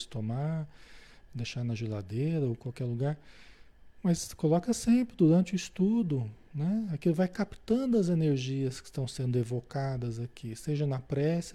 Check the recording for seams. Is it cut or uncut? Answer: uncut